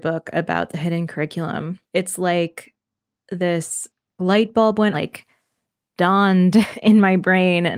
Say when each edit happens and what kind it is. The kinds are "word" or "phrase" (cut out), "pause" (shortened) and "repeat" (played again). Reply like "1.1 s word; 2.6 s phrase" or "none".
1.9 s pause; 4.1 s pause; 4.9 s phrase